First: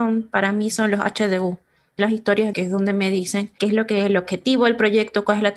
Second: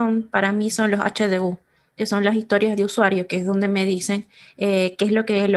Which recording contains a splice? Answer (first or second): first